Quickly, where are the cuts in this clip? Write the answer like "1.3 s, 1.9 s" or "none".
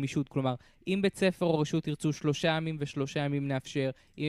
none